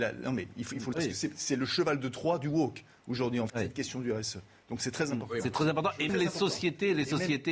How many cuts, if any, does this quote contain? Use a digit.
3